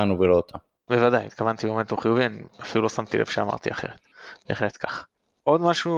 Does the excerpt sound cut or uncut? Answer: uncut